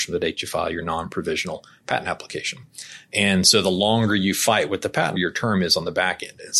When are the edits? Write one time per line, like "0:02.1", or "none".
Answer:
0:05.2